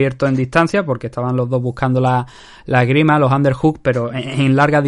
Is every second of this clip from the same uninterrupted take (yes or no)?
yes